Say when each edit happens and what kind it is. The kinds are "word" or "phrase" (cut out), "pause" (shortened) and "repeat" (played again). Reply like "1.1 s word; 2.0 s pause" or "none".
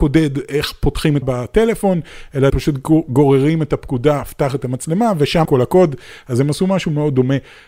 1.2 s word; 2.5 s word; 5.4 s word